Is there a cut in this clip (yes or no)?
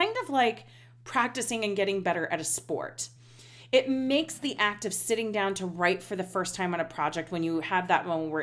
no